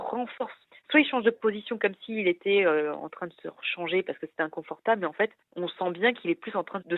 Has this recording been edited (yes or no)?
no